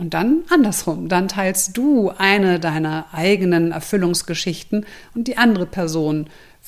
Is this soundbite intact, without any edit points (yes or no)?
yes